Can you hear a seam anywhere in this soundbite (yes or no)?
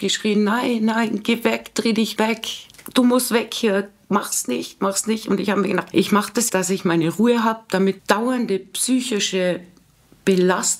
yes